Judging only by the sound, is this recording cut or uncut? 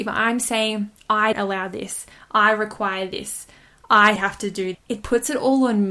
cut